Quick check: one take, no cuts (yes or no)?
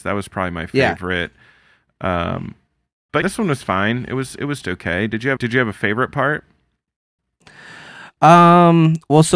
no